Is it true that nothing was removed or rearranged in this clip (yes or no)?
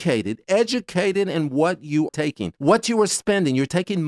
no